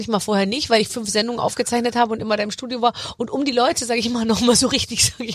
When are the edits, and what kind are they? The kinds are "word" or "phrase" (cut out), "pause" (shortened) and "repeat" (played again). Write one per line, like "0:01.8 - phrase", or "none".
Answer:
none